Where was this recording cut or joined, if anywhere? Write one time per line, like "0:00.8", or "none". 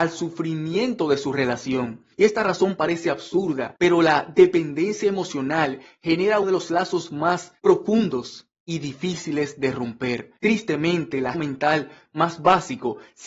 0:02.1
0:03.8
0:06.4
0:07.6
0:10.4
0:11.3